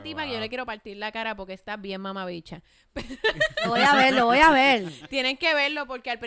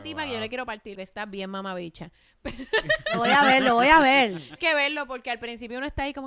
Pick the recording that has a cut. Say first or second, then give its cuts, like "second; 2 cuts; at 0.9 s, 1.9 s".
second; 2 cuts; at 0.9 s, 4.6 s